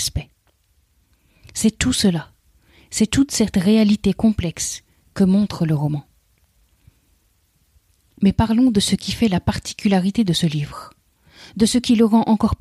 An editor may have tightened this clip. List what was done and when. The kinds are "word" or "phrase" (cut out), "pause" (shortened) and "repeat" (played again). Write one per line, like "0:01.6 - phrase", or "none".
none

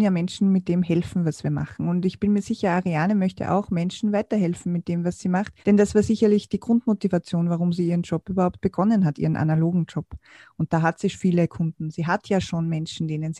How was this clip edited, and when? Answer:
0:05.6 - pause
0:11.1 - word

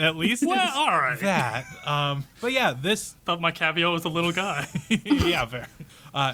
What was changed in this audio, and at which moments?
0:02.3 - pause

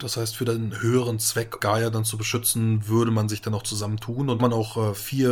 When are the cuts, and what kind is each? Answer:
0:01.6 - word
0:04.4 - phrase

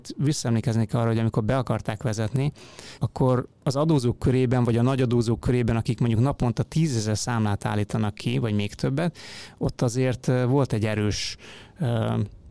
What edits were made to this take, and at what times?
0:03.0 - word
0:03.5 - pause

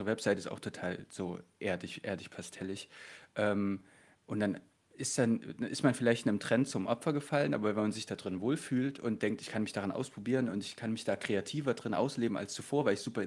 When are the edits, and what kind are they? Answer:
none

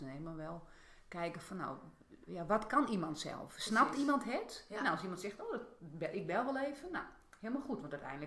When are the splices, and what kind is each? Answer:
0:02.3 - word

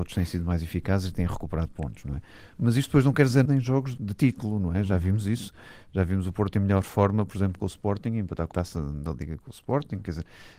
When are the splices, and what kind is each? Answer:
0:03.5 - word
0:04.0 - word
0:08.5 - phrase

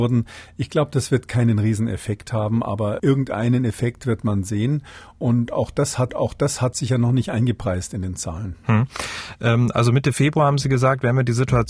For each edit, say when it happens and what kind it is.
0:03.0 - word
0:06.1 - repeat

